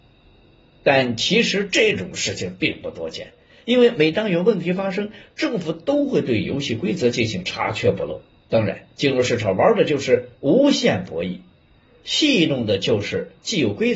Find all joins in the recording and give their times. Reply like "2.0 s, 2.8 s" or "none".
10.4 s

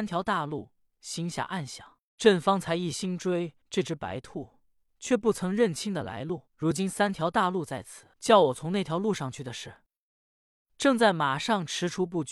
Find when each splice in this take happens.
3.6 s, 6.5 s, 8.1 s

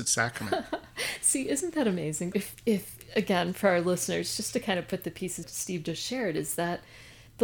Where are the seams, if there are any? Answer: 2.3 s, 5.4 s

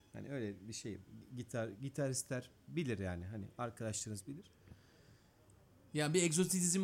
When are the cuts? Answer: none

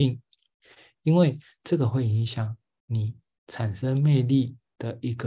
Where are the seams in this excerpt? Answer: none

